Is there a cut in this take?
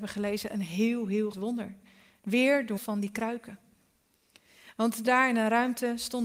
yes; 3 cuts; at 1.3 s, 2.8 s, 5.1 s

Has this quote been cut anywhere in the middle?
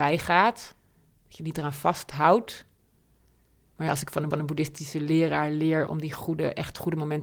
yes; 2 cuts; at 4.3 s, 5.9 s

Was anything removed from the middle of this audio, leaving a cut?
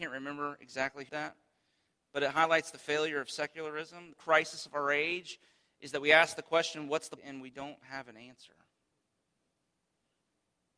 yes; 3 cuts; at 1.1 s, 4.1 s, 7.2 s

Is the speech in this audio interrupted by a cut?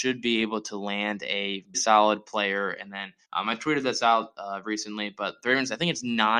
yes; 2 cuts; at 1.7 s, 3.2 s

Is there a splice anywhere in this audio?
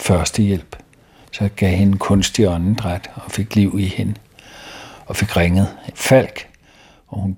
yes; 1 cut; at 5.9 s

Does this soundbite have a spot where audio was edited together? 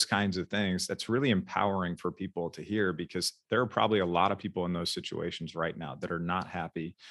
no; 0 cuts

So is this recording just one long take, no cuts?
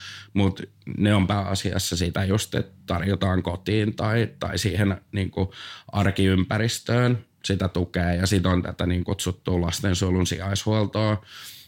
yes; 0 cuts

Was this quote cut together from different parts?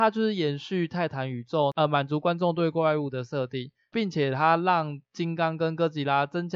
yes; 1 cut; at 5.0 s

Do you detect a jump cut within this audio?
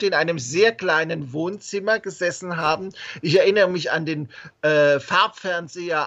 no; 0 cuts

